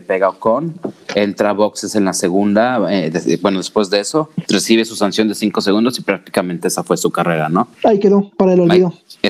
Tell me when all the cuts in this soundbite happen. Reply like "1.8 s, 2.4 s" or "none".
7.7 s